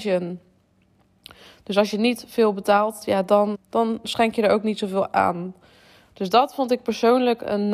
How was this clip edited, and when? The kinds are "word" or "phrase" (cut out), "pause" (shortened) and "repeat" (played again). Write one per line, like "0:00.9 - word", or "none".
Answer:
0:03.5 - word
0:05.1 - word